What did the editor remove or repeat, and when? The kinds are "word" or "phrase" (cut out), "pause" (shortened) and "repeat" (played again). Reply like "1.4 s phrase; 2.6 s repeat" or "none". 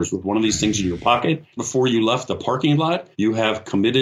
1.6 s word; 3.1 s pause